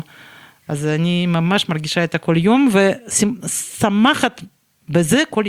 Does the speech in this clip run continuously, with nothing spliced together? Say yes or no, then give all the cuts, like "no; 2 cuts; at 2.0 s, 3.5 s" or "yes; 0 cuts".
yes; 0 cuts